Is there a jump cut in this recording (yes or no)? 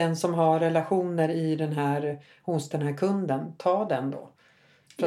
no